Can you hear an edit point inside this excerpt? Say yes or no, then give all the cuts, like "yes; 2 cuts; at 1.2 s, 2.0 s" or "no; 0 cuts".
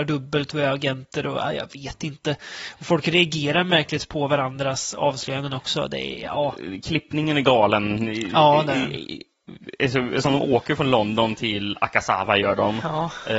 no; 0 cuts